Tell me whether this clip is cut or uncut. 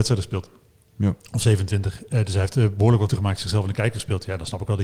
cut